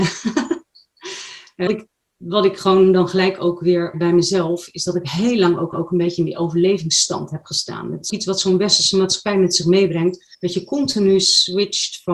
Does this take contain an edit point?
yes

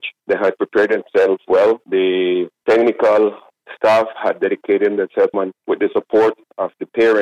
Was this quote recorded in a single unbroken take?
no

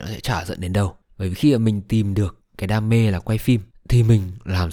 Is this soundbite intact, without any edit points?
yes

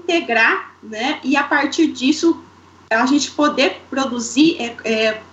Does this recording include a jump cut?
no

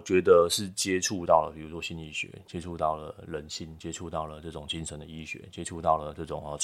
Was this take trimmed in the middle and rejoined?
no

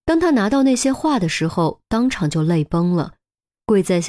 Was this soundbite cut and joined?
no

